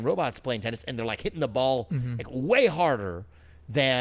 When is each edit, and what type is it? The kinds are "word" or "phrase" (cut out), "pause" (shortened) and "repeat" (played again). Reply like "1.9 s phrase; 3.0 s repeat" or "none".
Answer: none